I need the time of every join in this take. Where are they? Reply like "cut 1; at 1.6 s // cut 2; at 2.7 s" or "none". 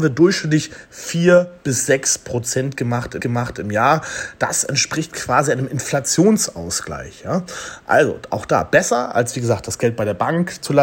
cut 1; at 3.2 s

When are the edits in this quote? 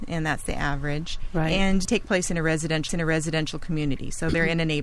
cut 1; at 1.8 s // cut 2; at 2.9 s

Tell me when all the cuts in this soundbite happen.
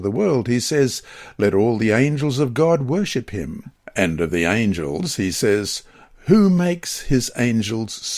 none

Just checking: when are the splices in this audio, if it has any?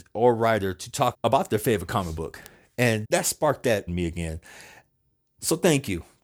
cut 1; at 1.1 s // cut 2; at 3.0 s // cut 3; at 3.9 s

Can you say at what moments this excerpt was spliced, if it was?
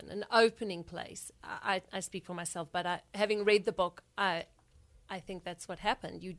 none

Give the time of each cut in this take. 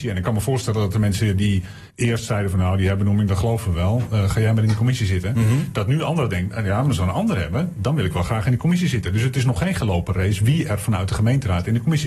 cut 1; at 1.9 s

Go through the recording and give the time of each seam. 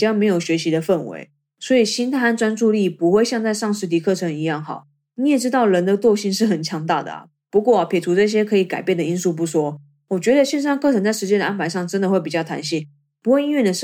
none

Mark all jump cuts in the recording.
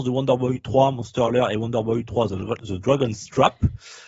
none

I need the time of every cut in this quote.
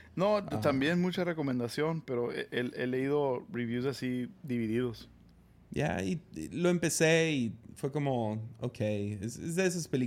cut 1; at 4.3 s

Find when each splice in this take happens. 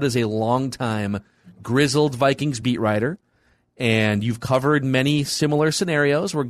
none

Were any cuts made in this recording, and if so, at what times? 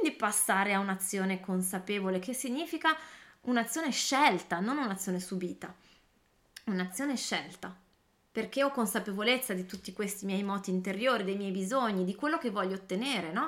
none

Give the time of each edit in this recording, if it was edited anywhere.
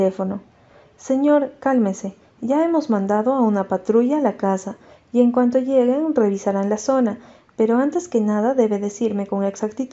none

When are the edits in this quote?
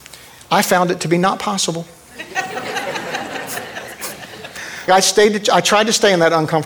cut 1; at 4.9 s

